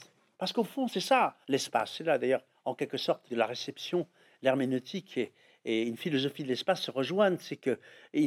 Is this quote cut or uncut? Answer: cut